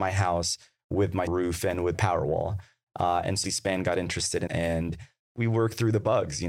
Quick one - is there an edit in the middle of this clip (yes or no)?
yes